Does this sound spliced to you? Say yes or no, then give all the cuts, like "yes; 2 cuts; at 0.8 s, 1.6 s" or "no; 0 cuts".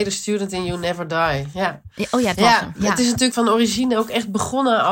yes; 2 cuts; at 2.3 s, 3.3 s